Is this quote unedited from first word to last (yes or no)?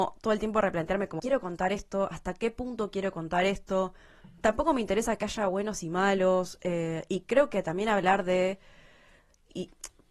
no